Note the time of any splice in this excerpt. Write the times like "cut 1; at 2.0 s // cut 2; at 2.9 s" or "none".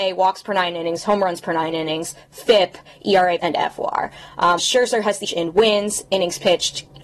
cut 1; at 3.4 s // cut 2; at 4.6 s // cut 3; at 5.2 s